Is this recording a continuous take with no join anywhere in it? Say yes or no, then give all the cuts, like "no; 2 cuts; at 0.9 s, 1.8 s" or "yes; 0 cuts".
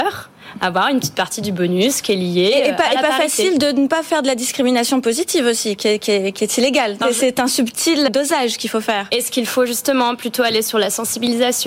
no; 2 cuts; at 7.0 s, 8.1 s